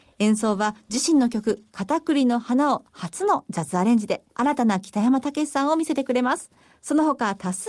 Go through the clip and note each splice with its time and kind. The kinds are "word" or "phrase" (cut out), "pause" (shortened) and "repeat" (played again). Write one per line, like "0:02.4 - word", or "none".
0:04.3 - pause
0:06.6 - pause